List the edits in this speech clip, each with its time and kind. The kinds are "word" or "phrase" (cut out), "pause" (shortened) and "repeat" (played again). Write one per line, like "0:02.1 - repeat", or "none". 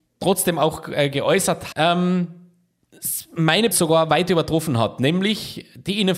0:01.7 - word
0:03.7 - word

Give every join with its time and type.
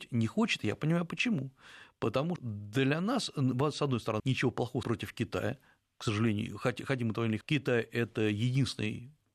0:02.4 - word
0:04.2 - word
0:04.8 - word
0:07.4 - word

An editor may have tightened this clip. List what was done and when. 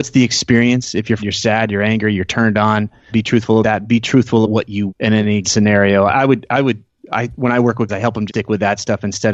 0:01.2 - word
0:03.1 - word
0:03.6 - word
0:04.4 - word
0:04.9 - word
0:05.4 - word
0:07.9 - word
0:08.3 - word

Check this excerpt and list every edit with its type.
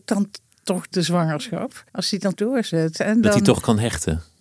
0:00.9 - word
0:01.9 - pause
0:02.3 - word

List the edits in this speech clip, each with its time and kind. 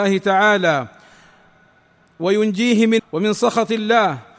0:03.0 - word

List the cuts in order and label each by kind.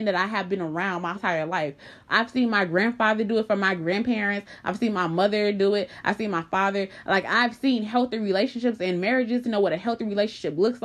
0:01.1 - word
0:09.4 - word

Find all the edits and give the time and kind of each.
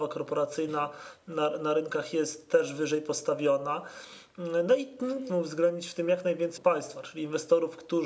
0:05.3 - phrase
0:06.6 - word

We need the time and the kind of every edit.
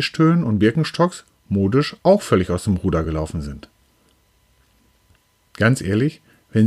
none

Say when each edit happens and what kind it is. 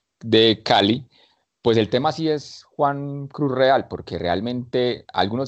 none

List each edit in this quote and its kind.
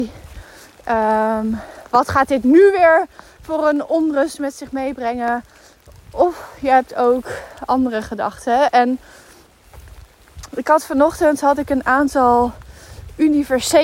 none

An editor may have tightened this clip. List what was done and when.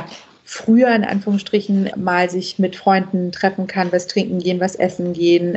0:01.9 - word

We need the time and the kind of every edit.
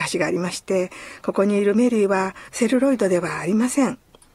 0:02.5 - pause

